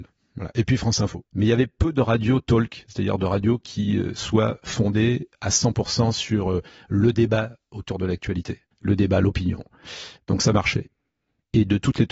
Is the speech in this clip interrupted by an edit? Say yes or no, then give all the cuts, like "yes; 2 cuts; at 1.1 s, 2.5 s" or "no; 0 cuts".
yes; 2 cuts; at 1.3 s, 8.7 s